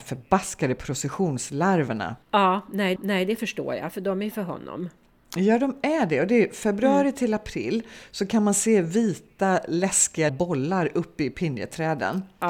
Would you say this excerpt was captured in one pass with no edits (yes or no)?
no